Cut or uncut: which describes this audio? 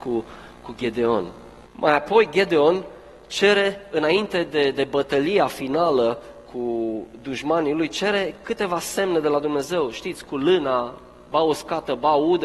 cut